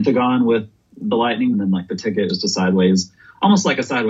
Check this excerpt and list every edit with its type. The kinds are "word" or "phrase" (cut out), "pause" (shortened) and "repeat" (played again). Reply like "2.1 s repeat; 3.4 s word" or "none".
1.5 s phrase; 2.3 s word